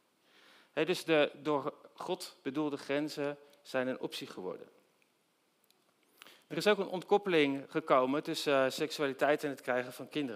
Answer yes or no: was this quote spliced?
no